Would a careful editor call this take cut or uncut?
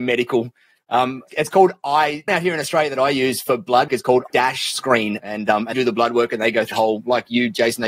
cut